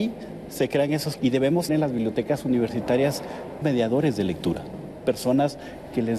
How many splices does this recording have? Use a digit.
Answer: 4